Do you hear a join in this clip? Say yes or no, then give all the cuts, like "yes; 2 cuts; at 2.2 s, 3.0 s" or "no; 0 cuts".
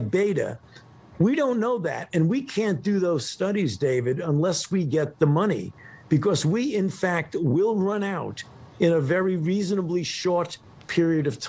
no; 0 cuts